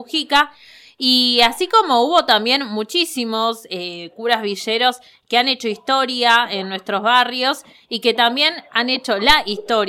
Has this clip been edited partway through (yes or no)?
no